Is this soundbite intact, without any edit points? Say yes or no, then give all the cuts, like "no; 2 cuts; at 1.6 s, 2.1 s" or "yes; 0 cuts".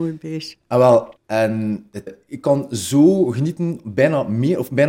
no; 2 cuts; at 1.2 s, 2.1 s